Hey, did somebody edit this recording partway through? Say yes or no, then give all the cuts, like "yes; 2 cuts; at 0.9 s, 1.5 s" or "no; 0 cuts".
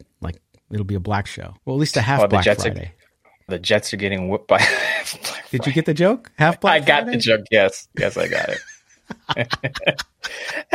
yes; 3 cuts; at 1.3 s, 1.6 s, 3.5 s